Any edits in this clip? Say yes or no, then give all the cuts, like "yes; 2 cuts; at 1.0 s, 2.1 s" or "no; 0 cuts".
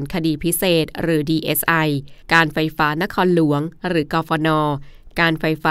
yes; 1 cut; at 2.2 s